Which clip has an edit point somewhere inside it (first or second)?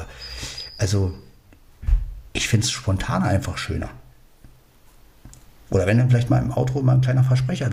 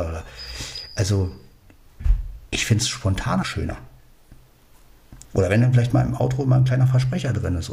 second